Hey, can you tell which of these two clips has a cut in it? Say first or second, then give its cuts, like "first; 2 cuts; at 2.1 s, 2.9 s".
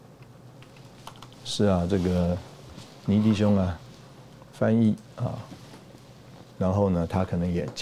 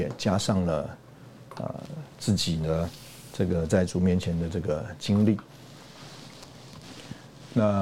first; 1 cut; at 6.5 s